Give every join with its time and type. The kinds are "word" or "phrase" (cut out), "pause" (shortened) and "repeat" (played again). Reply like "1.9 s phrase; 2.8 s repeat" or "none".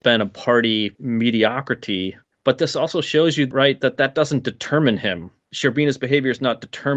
none